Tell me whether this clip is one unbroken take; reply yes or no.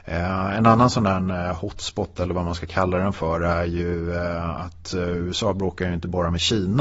yes